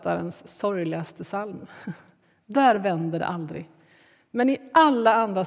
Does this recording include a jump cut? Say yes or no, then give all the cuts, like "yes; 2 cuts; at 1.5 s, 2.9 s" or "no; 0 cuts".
no; 0 cuts